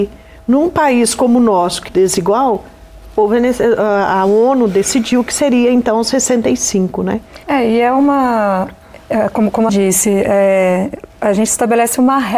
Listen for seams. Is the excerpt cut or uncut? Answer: cut